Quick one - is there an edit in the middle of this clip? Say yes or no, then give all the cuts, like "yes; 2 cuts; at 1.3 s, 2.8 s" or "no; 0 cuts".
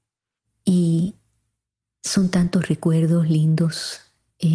no; 0 cuts